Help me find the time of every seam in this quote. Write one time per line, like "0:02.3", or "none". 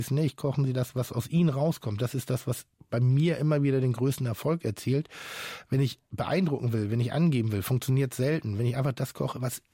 none